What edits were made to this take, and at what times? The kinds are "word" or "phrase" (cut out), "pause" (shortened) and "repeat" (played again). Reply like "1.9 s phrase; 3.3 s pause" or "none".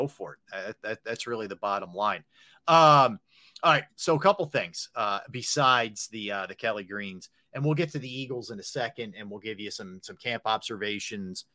none